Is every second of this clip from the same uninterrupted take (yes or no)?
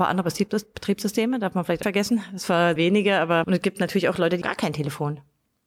no